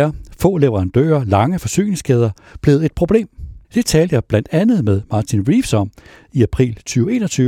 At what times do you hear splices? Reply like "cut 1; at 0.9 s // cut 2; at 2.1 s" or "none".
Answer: cut 1; at 3.6 s